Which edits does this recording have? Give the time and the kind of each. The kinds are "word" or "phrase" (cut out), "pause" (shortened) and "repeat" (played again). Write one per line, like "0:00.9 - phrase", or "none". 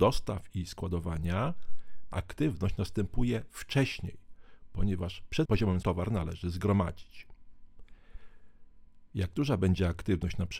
0:02.1 - word
0:05.5 - word
0:05.8 - word